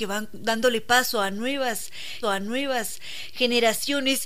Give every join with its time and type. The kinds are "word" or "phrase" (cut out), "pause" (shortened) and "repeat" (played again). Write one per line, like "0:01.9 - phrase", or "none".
0:02.2 - repeat